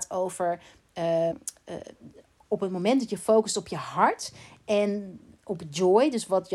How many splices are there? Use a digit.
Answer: 1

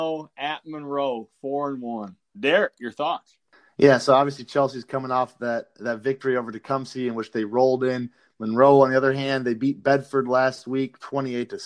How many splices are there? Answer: 0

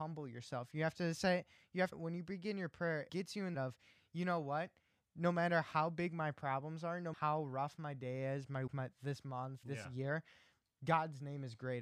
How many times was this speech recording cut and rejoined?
6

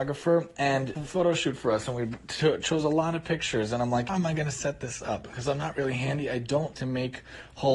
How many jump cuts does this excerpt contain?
3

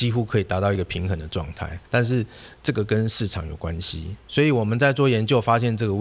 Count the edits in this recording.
1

